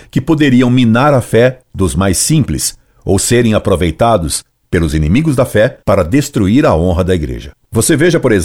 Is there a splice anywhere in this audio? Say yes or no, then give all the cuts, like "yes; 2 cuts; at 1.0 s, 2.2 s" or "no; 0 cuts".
yes; 1 cut; at 5.8 s